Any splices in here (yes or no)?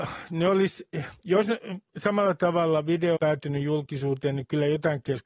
yes